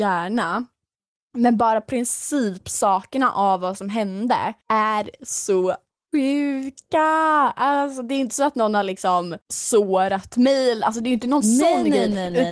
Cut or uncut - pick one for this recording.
cut